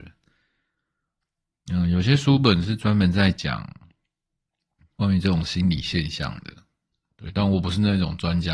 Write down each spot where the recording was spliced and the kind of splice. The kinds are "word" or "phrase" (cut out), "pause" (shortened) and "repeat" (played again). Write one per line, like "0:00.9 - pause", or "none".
none